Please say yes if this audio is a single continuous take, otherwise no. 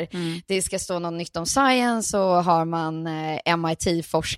yes